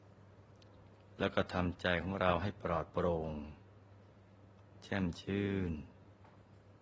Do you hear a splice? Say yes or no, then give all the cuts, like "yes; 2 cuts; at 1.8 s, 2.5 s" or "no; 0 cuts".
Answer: no; 0 cuts